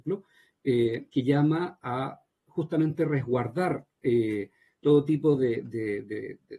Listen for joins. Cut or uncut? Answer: uncut